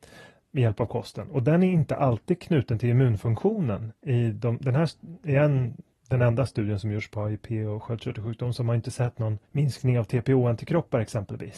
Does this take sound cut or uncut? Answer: cut